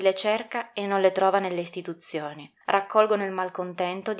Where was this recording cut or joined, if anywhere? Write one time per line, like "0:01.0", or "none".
0:02.6